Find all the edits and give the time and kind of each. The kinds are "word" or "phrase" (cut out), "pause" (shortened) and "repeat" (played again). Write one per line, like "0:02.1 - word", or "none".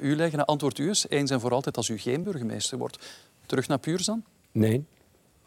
none